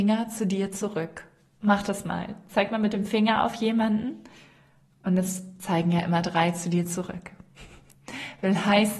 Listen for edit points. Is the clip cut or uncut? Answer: uncut